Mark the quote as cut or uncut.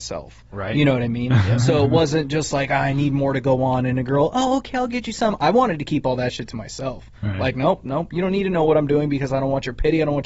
uncut